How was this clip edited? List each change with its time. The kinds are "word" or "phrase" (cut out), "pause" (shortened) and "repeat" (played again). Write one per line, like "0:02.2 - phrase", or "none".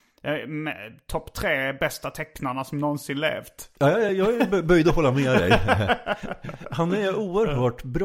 none